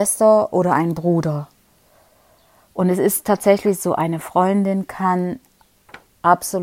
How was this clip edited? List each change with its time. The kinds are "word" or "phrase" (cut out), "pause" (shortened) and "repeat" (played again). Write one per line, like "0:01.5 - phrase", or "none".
none